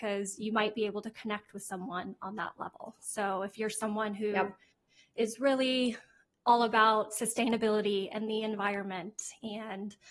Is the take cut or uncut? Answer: uncut